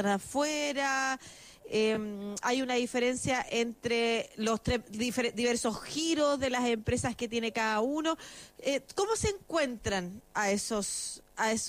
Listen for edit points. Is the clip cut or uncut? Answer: uncut